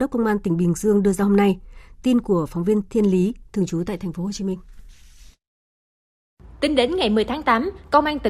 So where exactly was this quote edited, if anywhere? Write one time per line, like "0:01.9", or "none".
none